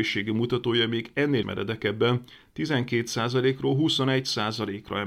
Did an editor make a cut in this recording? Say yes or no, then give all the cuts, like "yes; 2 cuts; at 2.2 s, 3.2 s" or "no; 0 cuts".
yes; 1 cut; at 1.4 s